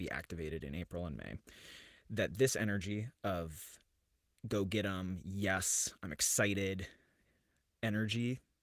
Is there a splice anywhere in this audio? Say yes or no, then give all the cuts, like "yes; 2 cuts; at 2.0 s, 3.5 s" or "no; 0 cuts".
no; 0 cuts